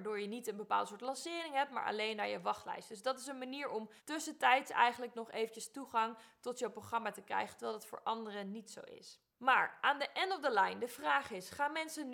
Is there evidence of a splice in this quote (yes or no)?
yes